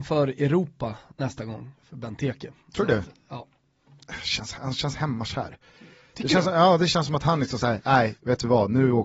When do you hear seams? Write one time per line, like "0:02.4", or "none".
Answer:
none